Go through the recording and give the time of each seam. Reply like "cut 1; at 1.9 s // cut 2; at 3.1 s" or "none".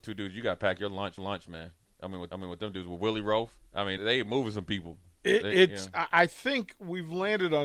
cut 1; at 1.2 s // cut 2; at 2.3 s // cut 3; at 3.7 s // cut 4; at 4.0 s

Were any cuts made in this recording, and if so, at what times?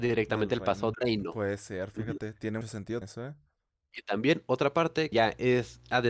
cut 1; at 0.9 s // cut 2; at 2.6 s // cut 3; at 3.0 s // cut 4; at 5.1 s

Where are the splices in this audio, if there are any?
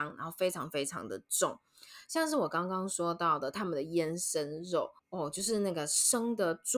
cut 1; at 5.0 s

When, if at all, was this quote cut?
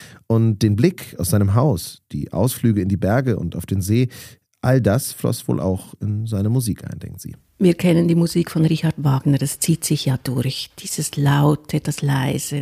none

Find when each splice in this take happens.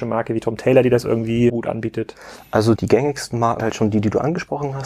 cut 1; at 1.5 s // cut 2; at 2.8 s // cut 3; at 3.6 s

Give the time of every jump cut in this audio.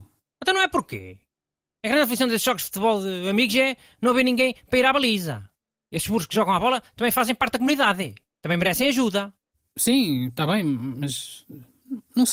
none

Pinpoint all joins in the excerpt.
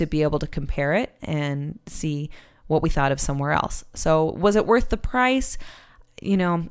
none

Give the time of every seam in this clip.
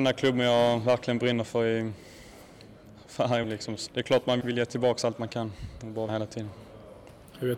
cut 1; at 3.4 s // cut 2; at 3.9 s // cut 3; at 4.4 s // cut 4; at 6.1 s

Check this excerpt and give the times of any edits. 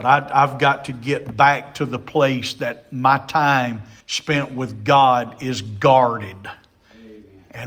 cut 1; at 4.0 s

